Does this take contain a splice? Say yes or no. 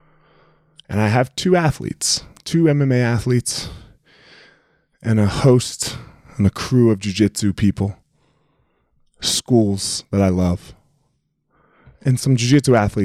no